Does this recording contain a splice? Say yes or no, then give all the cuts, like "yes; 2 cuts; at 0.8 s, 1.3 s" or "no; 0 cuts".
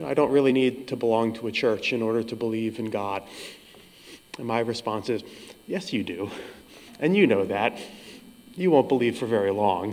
no; 0 cuts